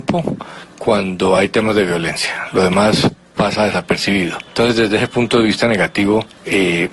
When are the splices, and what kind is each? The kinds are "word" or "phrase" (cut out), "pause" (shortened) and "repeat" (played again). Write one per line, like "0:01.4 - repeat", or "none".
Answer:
none